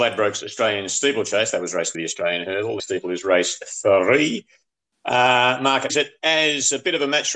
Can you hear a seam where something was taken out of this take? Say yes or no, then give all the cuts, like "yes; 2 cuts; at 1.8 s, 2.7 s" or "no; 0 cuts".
yes; 3 cuts; at 1.9 s, 2.8 s, 5.9 s